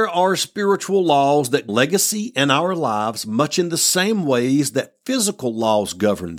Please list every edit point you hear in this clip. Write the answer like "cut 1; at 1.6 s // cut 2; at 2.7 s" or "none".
cut 1; at 1.7 s